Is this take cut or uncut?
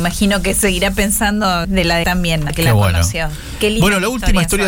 cut